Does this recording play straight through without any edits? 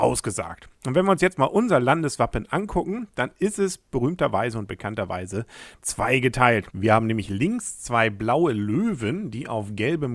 yes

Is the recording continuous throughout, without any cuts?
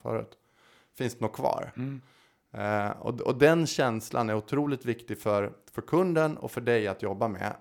yes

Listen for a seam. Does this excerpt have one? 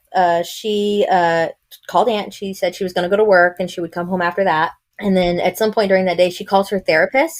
no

